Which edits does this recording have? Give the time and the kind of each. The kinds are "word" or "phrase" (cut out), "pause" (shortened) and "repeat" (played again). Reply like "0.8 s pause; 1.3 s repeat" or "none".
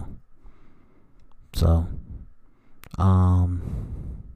none